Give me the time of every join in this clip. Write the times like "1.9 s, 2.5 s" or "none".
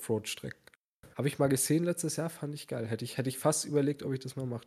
1.1 s